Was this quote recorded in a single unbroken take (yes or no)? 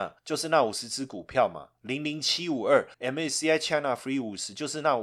no